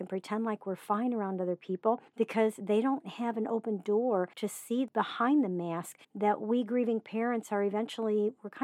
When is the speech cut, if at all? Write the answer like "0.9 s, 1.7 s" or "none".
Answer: 2.1 s, 4.3 s, 6.0 s